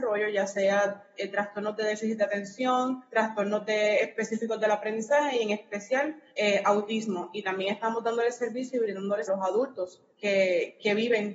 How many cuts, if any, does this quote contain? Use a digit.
4